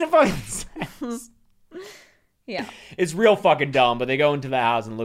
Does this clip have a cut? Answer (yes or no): no